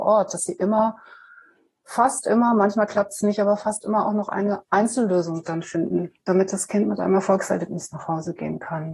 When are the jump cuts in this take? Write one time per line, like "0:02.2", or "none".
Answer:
0:06.2

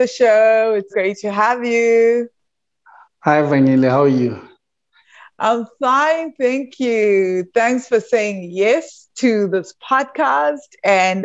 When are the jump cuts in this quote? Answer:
0:00.9

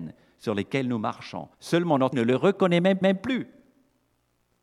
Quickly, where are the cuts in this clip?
0:01.5
0:02.1
0:03.0

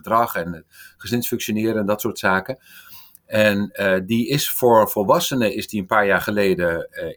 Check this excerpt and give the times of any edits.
none

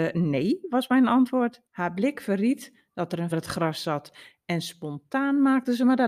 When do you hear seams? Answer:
0:01.7
0:03.3

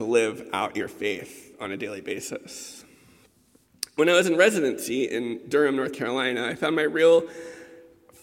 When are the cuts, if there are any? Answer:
none

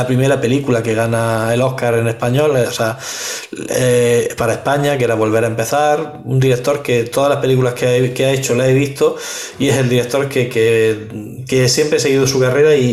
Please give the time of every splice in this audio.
none

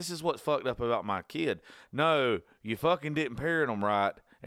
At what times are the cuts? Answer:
none

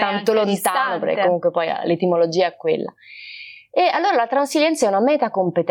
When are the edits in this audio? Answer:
none

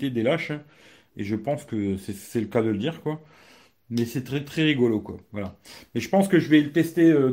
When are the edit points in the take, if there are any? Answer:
none

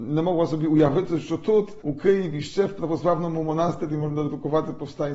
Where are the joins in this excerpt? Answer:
none

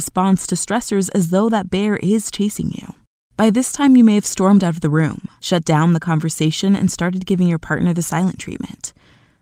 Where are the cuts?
none

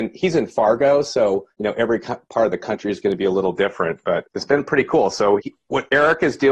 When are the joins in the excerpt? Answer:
0:01.5
0:04.2
0:05.4

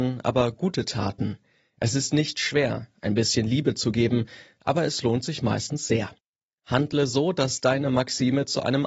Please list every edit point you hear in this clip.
none

